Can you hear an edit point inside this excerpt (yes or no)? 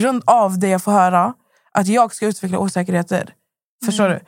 no